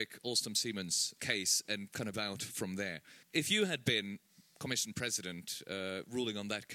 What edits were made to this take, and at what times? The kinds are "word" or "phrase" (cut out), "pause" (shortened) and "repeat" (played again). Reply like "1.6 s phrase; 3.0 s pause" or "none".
1.2 s word; 2.1 s word; 3.2 s pause